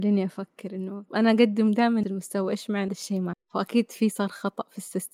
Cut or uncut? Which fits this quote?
cut